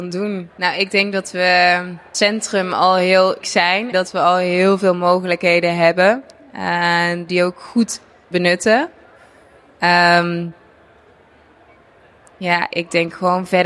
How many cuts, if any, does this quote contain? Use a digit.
5